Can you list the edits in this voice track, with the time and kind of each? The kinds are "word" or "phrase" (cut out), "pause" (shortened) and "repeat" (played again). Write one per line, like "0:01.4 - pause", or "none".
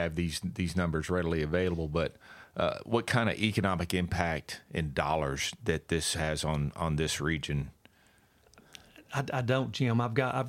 none